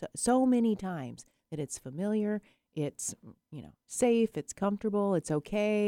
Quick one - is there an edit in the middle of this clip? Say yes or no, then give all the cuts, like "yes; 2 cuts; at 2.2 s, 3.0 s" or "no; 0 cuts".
no; 0 cuts